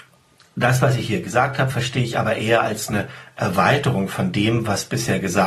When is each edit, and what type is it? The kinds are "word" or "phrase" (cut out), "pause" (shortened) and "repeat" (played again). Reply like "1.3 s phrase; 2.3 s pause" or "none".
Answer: none